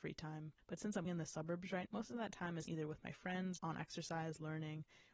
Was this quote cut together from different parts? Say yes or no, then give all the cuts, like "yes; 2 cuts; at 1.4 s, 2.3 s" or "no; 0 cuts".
yes; 4 cuts; at 1.0 s, 1.9 s, 2.7 s, 3.6 s